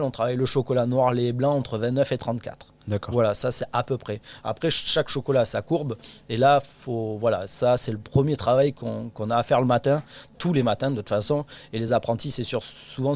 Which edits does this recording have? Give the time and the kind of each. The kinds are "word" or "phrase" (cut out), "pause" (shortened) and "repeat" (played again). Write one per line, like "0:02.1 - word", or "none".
none